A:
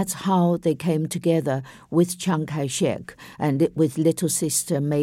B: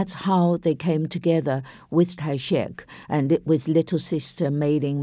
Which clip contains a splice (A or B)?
B